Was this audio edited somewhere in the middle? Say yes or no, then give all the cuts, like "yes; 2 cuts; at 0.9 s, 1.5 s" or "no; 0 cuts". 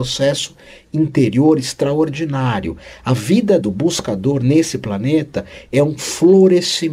yes; 1 cut; at 3.6 s